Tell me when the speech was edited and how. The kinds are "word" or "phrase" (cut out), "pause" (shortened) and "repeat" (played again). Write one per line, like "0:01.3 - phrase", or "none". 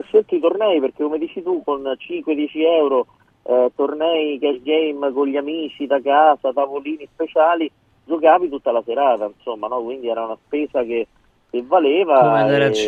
none